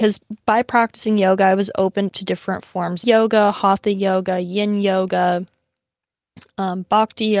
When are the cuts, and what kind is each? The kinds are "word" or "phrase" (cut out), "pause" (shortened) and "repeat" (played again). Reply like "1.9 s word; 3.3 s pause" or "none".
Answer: 2.1 s word; 3.0 s phrase